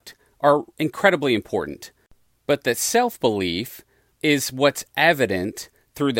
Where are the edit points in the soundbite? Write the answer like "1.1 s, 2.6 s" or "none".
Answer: none

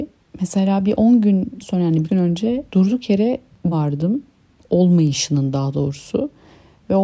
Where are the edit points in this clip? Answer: 1.6 s, 2.1 s, 2.7 s, 3.7 s

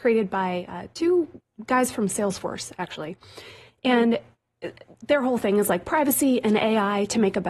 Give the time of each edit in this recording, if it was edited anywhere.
none

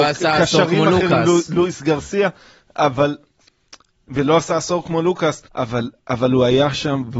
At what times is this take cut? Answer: 5.5 s

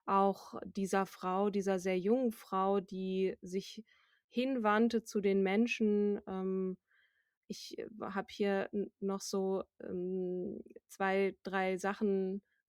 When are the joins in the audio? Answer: none

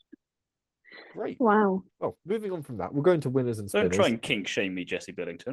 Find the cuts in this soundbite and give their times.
1.9 s

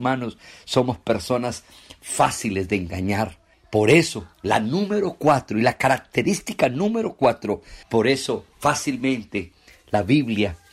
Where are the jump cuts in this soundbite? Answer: 3.5 s, 4.3 s, 7.8 s, 8.5 s

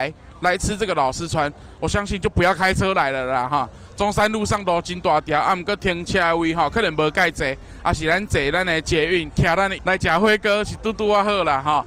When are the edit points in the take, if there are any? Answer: 9.8 s

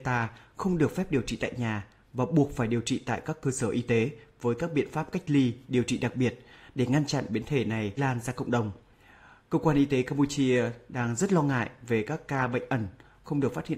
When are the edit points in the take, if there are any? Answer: 8.0 s

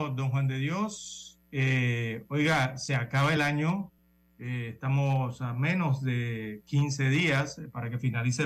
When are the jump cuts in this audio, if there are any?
none

